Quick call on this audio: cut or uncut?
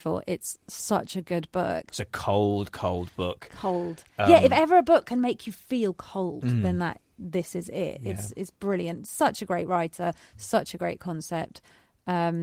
uncut